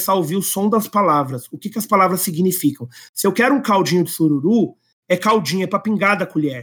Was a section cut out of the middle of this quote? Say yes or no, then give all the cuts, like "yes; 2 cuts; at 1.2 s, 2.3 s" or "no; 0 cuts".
no; 0 cuts